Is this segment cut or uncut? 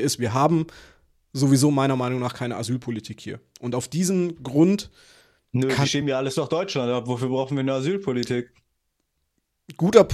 uncut